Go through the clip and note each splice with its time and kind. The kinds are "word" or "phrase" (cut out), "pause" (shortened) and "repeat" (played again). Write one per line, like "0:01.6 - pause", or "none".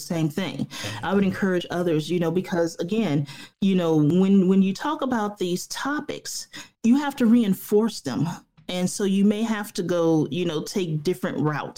0:03.5 - pause
0:06.7 - pause

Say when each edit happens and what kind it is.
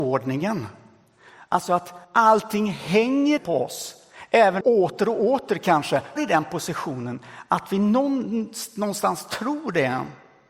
0:02.0 - pause
0:03.4 - word
0:04.6 - phrase
0:06.2 - word

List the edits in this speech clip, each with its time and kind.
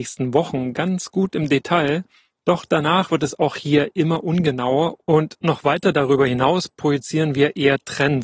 none

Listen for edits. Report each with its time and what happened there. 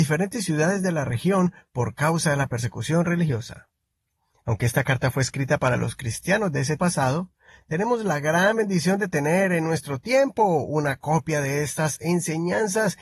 0:06.8 - word

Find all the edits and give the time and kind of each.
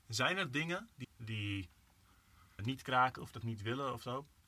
0:01.0 - word
0:02.6 - word

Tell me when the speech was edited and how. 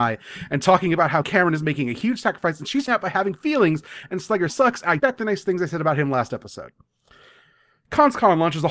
0:01.2 - word
0:02.9 - word
0:04.5 - word
0:05.0 - word

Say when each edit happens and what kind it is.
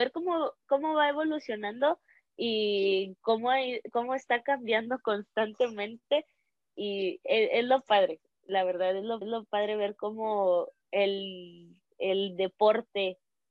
0:09.2 - repeat

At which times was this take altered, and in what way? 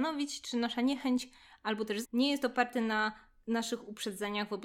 0:02.0 - word

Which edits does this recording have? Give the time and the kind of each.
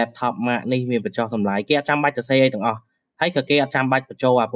none

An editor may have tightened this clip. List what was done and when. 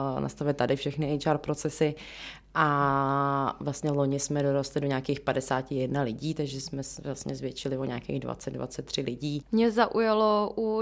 none

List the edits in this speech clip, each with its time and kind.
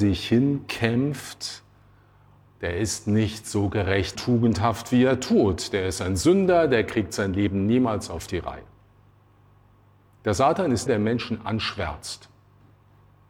0:04.1 - word
0:10.9 - word

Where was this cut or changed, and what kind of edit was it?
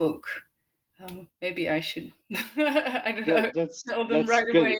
none

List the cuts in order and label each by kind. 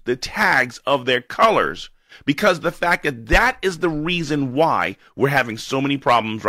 none

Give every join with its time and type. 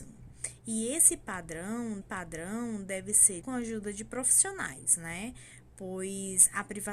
0:02.0 - repeat
0:03.4 - word

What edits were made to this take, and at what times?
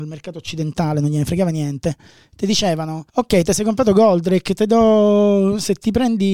0:03.1 - pause

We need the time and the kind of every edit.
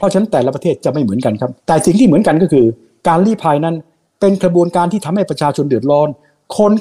0:01.6 - pause

